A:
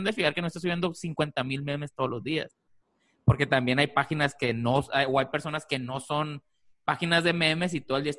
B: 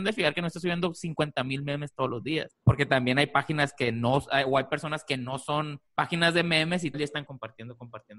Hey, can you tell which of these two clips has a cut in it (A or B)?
B